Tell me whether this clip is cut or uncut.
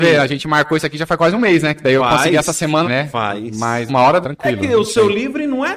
cut